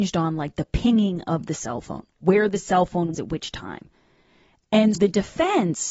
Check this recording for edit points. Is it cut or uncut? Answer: cut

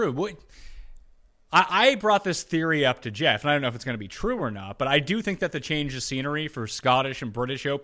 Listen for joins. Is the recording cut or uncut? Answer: uncut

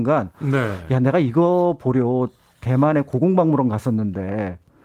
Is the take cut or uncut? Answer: uncut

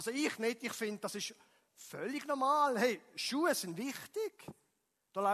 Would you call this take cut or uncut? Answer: uncut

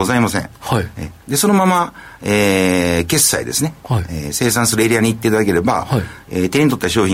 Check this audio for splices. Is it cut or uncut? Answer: cut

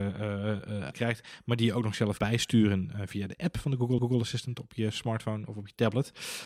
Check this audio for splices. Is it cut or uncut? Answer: cut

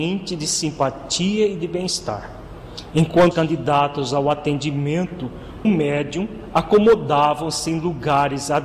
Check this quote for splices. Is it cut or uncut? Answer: cut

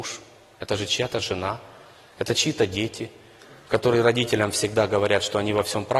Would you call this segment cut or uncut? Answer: uncut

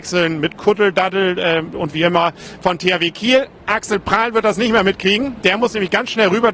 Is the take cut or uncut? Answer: uncut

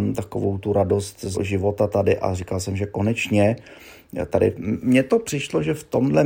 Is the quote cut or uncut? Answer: cut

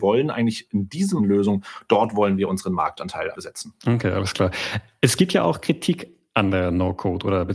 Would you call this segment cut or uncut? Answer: cut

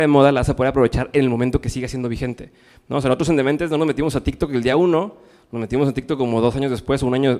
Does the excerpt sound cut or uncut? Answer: uncut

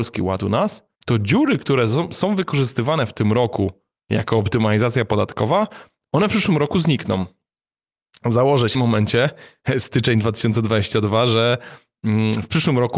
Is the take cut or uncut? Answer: cut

